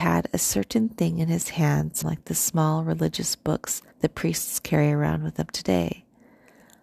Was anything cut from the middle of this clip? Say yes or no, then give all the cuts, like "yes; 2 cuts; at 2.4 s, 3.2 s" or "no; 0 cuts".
yes; 2 cuts; at 2.0 s, 3.9 s